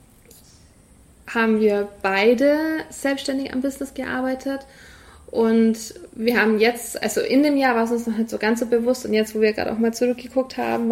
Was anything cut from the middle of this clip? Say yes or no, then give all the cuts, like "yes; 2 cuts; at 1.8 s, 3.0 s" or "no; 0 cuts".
no; 0 cuts